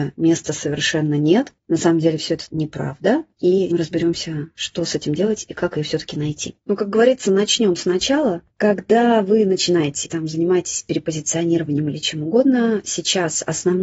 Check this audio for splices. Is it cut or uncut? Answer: cut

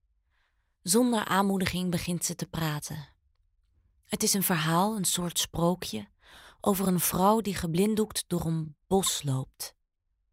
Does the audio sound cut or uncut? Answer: uncut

